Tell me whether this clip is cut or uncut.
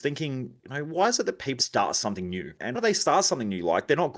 cut